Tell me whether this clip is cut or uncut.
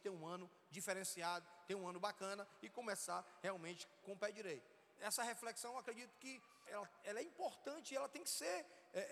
cut